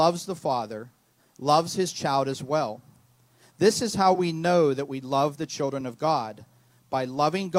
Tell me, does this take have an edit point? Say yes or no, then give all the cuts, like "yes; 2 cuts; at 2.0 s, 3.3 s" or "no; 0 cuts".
no; 0 cuts